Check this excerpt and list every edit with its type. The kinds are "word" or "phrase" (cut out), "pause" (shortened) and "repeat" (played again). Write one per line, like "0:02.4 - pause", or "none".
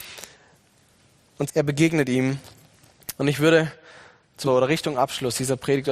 0:01.5 - word
0:03.2 - pause
0:04.5 - phrase